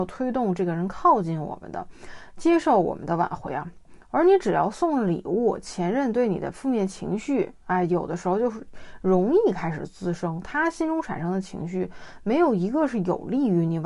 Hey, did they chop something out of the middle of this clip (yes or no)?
no